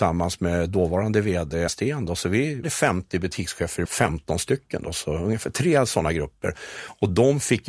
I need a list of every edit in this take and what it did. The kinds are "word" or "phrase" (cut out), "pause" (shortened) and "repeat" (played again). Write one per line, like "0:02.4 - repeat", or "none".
0:01.7 - word
0:02.6 - phrase
0:03.8 - phrase